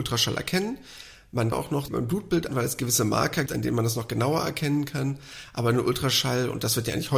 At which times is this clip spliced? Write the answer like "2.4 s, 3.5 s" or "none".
1.5 s, 1.9 s, 2.5 s, 3.5 s